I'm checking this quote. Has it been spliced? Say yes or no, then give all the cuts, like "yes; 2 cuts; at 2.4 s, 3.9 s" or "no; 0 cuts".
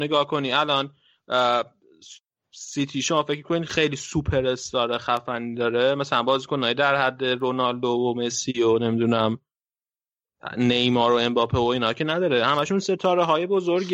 no; 0 cuts